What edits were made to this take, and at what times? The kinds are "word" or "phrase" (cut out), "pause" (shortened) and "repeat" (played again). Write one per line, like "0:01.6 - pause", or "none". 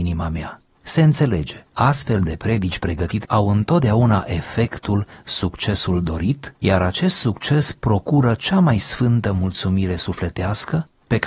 0:01.7 - pause
0:03.2 - word
0:06.5 - word